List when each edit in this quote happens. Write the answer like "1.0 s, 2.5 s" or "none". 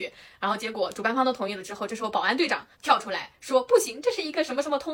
2.7 s